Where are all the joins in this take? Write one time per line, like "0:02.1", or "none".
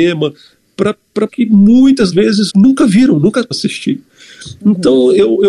0:01.3
0:02.1
0:02.5
0:03.5